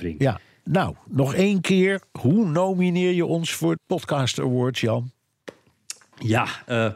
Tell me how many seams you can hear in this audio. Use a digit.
1